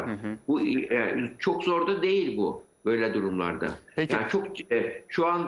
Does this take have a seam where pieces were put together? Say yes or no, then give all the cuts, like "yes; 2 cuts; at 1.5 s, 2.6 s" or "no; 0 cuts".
no; 0 cuts